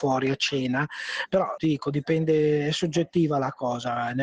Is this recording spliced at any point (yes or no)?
yes